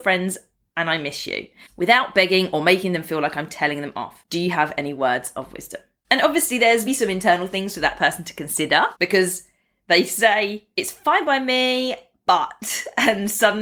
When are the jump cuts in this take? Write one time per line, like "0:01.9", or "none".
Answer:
0:06.9